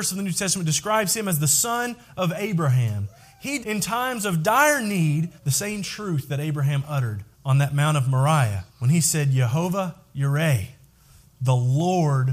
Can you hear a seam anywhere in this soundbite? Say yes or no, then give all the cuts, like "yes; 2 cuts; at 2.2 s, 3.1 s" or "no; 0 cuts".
yes; 4 cuts; at 3.6 s, 5.4 s, 7.3 s, 8.7 s